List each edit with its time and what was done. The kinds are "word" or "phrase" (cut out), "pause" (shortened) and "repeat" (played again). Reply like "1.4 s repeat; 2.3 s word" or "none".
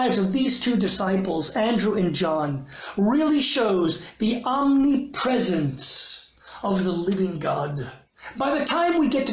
none